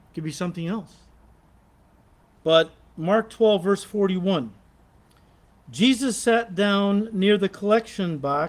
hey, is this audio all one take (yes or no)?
yes